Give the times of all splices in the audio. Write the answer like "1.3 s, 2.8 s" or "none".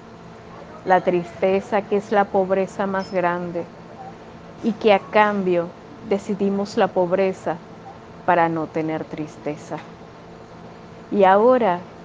none